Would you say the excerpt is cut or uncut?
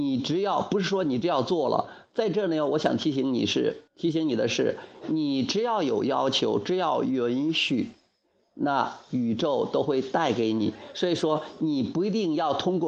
cut